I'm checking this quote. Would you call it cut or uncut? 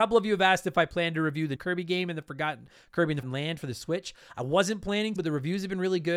cut